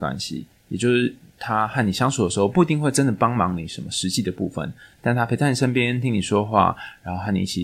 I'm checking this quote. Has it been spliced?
no; 0 cuts

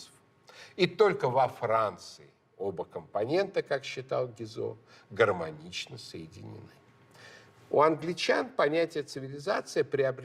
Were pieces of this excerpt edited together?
no; 0 cuts

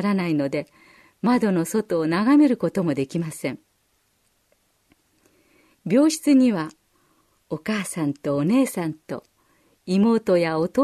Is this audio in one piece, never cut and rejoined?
yes; 0 cuts

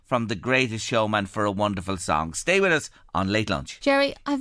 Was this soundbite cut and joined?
no; 0 cuts

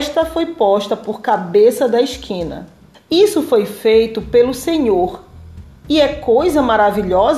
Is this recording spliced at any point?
yes; 1 cut; at 2.9 s

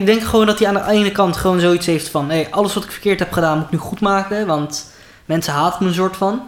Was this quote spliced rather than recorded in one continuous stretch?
no; 0 cuts

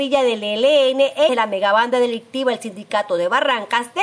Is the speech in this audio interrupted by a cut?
yes; 1 cut; at 1.3 s

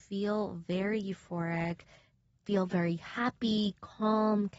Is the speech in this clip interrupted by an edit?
no; 0 cuts

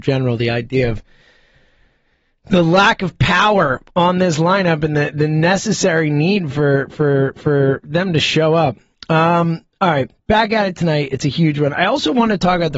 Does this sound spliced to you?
yes; 1 cut; at 7.4 s

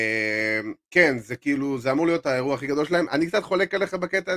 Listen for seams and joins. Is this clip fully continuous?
yes; 0 cuts

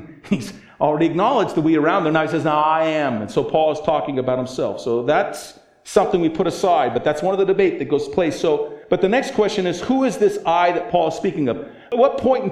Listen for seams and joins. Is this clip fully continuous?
yes; 0 cuts

